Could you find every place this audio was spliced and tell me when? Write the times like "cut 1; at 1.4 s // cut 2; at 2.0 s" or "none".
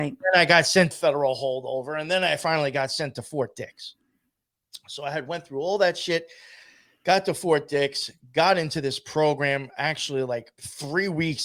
cut 1; at 0.9 s